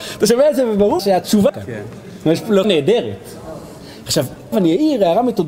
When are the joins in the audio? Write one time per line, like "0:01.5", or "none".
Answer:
0:01.0
0:01.5
0:02.6
0:04.5